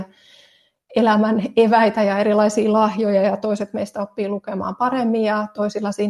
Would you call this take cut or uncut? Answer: uncut